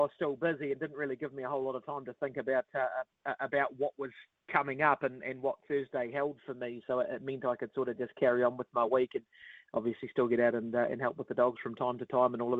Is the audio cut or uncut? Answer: uncut